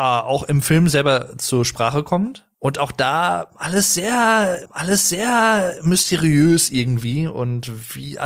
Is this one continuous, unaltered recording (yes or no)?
no